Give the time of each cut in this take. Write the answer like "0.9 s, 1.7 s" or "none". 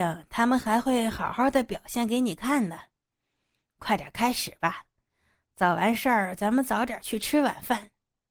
none